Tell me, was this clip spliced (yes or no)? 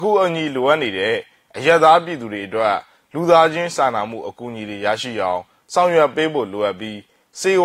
no